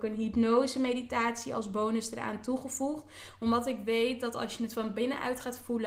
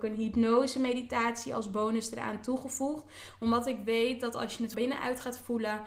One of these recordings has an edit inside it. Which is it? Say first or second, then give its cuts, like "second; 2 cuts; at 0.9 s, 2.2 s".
second; 1 cut; at 4.7 s